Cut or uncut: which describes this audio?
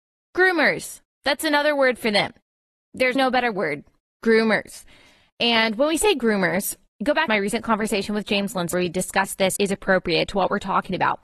cut